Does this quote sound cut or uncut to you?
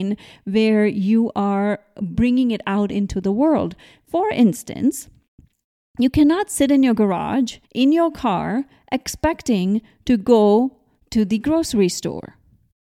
cut